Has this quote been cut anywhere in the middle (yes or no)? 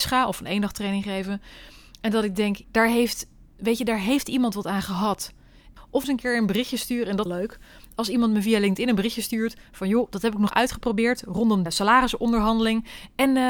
yes